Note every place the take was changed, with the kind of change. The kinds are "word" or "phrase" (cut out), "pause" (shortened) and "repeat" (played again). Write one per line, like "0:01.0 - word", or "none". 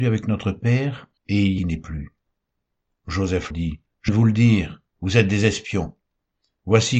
0:01.2 - pause
0:01.6 - phrase
0:03.5 - word
0:04.1 - word